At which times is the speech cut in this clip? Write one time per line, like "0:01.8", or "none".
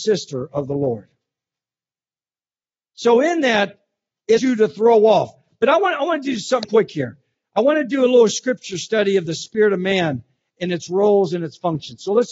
0:04.4
0:06.6